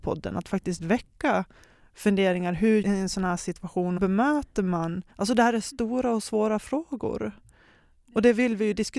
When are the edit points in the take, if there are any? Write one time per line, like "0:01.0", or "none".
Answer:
0:02.8
0:04.0
0:05.1